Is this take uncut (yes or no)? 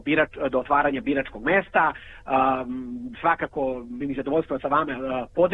no